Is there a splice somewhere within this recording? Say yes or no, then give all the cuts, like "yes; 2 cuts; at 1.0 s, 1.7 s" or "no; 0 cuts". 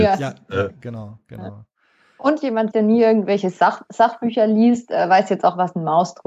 yes; 1 cut; at 2.7 s